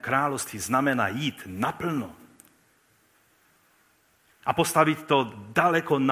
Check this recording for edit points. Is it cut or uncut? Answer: uncut